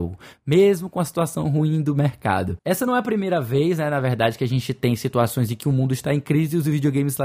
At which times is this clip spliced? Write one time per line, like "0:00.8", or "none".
none